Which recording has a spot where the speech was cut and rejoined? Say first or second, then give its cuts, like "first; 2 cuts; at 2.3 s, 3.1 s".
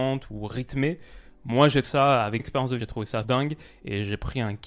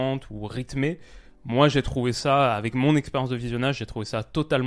first; 4 cuts; at 1.8 s, 2.4 s, 2.8 s, 3.2 s